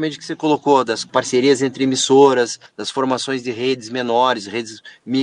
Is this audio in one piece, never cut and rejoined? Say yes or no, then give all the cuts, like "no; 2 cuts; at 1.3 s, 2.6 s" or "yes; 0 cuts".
yes; 0 cuts